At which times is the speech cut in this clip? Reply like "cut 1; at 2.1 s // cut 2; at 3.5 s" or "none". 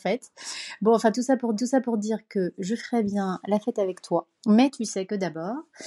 cut 1; at 1.6 s // cut 2; at 4.4 s